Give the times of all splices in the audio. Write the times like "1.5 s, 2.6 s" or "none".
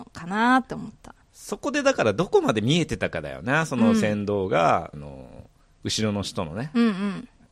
4.9 s